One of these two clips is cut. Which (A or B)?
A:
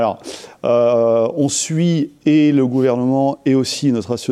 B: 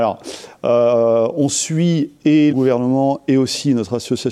B